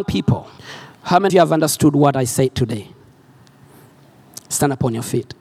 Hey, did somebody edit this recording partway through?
yes; 1 cut; at 1.3 s

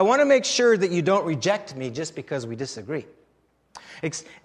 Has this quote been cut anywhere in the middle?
no; 0 cuts

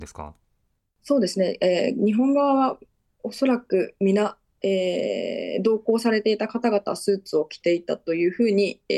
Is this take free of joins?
yes; 0 cuts

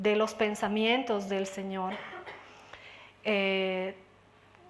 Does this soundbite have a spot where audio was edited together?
no; 0 cuts

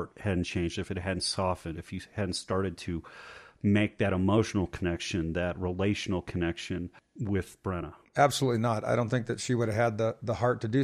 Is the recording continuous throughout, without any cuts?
no; 1 cut; at 8.0 s

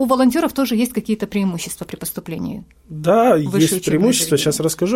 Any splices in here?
no; 0 cuts

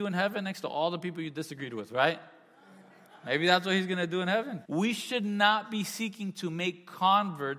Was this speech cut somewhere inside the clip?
yes; 1 cut; at 4.7 s

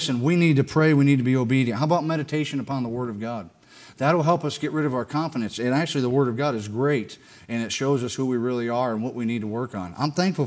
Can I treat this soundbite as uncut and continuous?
yes; 0 cuts

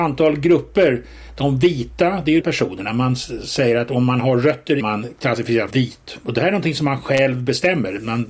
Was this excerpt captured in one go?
no; 3 cuts; at 2.4 s, 4.8 s, 5.7 s

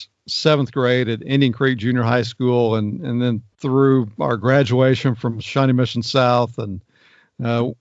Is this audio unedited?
no; 1 cut; at 3.5 s

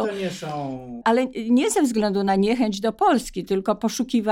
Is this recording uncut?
yes; 0 cuts

